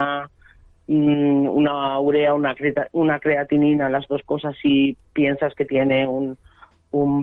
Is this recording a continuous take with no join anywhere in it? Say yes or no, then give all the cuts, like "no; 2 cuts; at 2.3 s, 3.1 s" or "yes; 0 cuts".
yes; 0 cuts